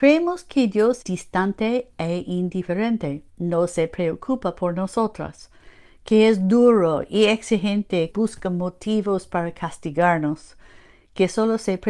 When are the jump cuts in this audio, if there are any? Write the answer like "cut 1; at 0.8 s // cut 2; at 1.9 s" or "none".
cut 1; at 1.0 s // cut 2; at 3.3 s // cut 3; at 8.1 s